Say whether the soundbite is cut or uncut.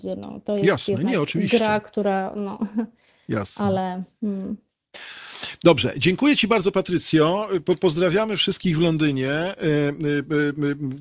uncut